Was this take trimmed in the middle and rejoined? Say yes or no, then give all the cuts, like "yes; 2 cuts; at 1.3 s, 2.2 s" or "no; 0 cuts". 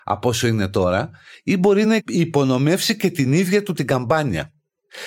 no; 0 cuts